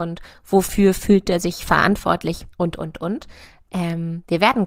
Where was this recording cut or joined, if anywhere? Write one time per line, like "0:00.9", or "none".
0:02.5